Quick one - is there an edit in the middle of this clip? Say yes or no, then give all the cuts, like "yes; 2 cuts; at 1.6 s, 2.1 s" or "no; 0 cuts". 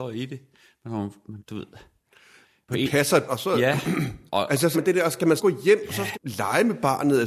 yes; 7 cuts; at 1.4 s, 2.7 s, 3.3 s, 4.3 s, 4.7 s, 5.4 s, 6.1 s